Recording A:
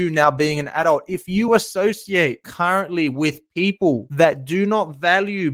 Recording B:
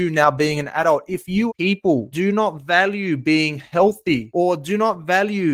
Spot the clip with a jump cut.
B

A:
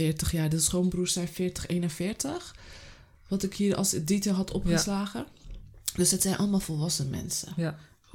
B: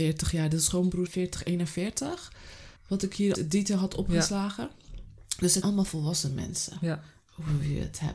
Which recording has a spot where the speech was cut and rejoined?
B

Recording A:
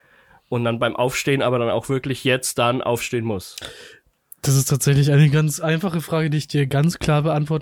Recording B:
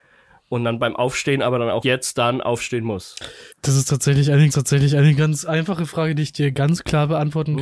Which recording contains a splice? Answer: B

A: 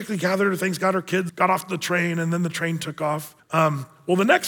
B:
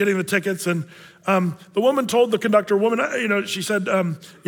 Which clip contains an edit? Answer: A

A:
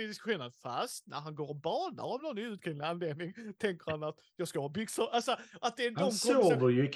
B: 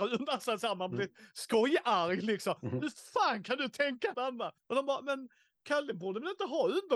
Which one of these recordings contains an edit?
B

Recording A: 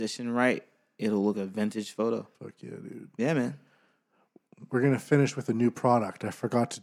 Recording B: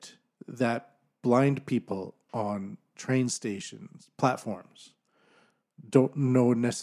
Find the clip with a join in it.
A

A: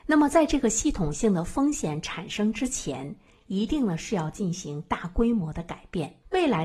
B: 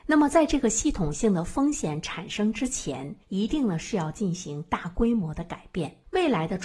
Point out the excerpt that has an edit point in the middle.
B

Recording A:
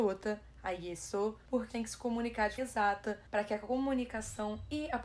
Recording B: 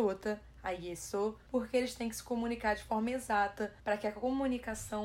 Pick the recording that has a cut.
A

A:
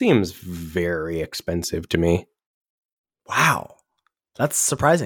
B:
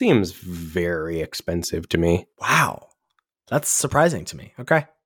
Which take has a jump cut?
B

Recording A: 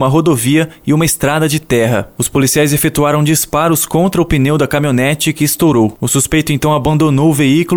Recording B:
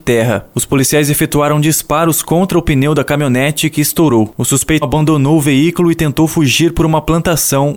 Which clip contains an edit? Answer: B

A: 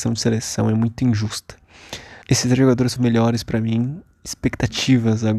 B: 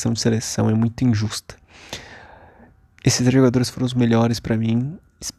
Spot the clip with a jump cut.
A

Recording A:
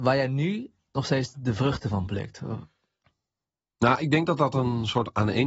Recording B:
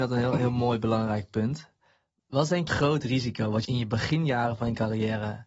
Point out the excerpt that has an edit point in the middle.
B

